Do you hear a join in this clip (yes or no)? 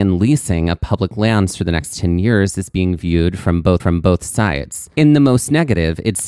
yes